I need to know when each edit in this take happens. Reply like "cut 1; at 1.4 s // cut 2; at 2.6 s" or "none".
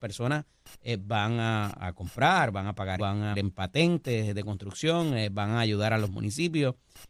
cut 1; at 1.8 s // cut 2; at 3.0 s // cut 3; at 3.3 s